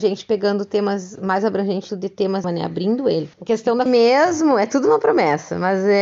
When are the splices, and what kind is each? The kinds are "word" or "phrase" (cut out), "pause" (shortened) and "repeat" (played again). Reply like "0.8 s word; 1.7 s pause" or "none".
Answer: 1.9 s word; 2.4 s phrase; 3.3 s pause; 3.9 s word